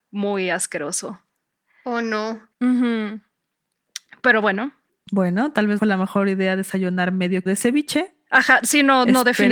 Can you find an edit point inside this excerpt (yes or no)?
yes